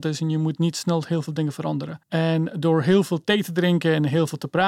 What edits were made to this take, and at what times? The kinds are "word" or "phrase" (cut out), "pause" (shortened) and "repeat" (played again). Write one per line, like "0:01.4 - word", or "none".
0:02.0 - pause